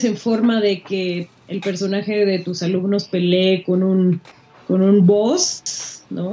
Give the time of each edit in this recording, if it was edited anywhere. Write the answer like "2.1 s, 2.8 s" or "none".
4.3 s